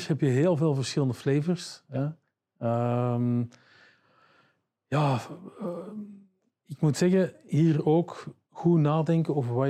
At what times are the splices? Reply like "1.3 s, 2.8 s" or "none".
8.4 s

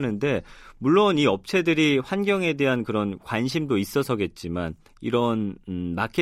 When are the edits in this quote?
none

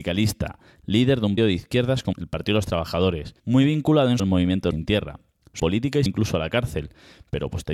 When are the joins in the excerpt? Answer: 1.4 s, 2.1 s, 3.4 s, 4.2 s, 4.7 s, 5.6 s, 6.1 s

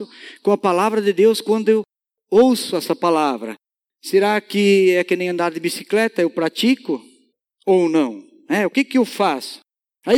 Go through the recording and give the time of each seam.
none

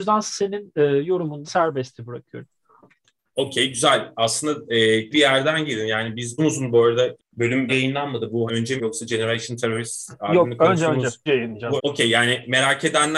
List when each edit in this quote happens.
1.4 s, 5.1 s, 6.4 s, 7.2 s, 7.7 s, 8.5 s, 8.8 s, 11.3 s, 11.8 s

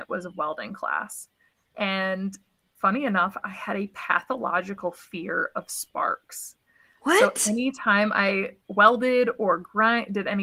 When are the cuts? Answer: none

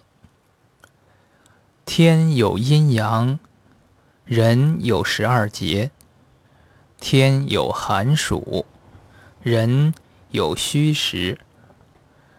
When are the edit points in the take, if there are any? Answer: none

